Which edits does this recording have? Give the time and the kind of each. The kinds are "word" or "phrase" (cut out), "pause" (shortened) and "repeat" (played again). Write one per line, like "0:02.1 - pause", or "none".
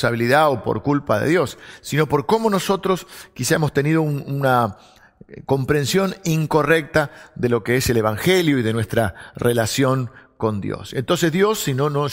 none

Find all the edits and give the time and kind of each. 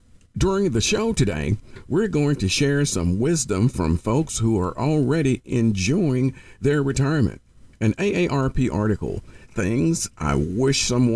0:09.5 - word

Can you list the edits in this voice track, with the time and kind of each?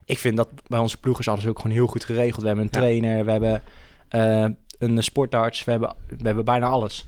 none

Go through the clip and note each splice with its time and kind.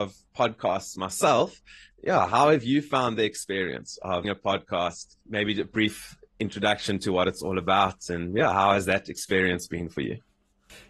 0:04.2 - word
0:05.2 - pause

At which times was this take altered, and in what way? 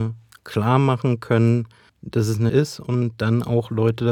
0:01.9 - pause
0:02.5 - word

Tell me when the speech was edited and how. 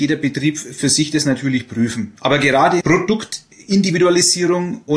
0:02.8 - phrase

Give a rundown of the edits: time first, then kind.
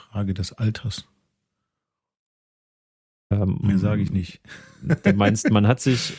none

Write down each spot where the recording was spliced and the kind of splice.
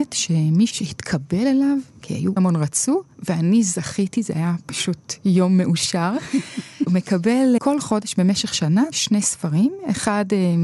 0:02.4 - word
0:07.6 - word

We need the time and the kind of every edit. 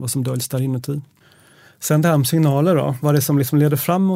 none

